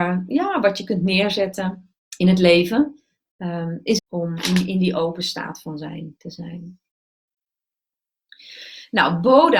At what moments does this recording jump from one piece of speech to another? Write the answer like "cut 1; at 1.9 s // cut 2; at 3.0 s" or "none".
cut 1; at 2.0 s // cut 2; at 4.0 s